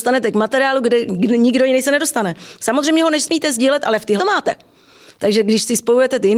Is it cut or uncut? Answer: cut